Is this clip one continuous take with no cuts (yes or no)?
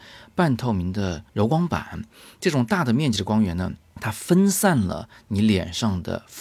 no